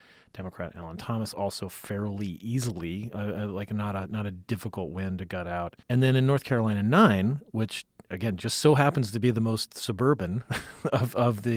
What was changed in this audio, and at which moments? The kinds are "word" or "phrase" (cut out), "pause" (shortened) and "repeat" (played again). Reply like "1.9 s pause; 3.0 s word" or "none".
5.8 s pause